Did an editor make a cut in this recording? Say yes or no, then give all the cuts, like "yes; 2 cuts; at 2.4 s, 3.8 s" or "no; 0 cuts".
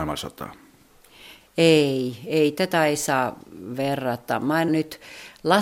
yes; 1 cut; at 4.7 s